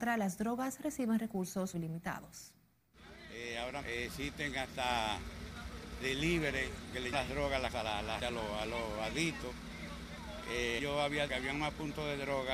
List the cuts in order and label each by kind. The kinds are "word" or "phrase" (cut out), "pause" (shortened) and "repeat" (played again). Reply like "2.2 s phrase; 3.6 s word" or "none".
1.7 s word; 3.8 s word; 6.0 s word; 7.1 s word; 7.7 s word; 8.2 s word; 10.8 s word; 11.3 s word